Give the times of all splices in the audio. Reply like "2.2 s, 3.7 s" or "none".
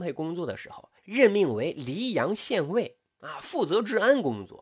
1.0 s